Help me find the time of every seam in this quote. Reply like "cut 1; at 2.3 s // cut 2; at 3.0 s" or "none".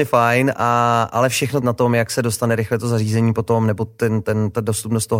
cut 1; at 1.6 s